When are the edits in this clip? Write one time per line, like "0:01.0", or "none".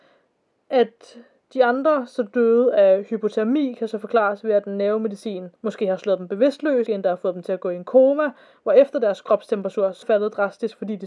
0:05.5
0:06.9
0:10.0

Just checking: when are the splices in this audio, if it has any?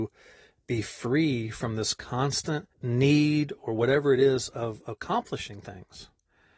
0:02.7

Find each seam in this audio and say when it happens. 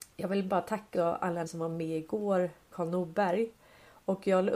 0:00.9
0:01.5
0:02.7

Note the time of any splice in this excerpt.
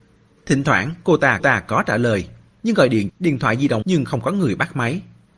0:01.4
0:02.5
0:03.1
0:03.8

